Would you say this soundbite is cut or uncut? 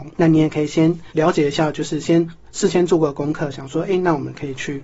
cut